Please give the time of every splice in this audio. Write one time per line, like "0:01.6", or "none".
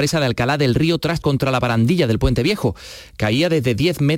0:01.2